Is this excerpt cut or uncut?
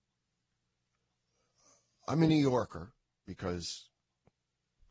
uncut